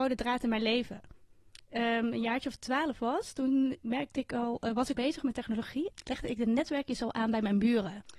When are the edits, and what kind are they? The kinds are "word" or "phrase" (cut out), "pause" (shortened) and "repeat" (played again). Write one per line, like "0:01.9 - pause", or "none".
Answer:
0:04.9 - word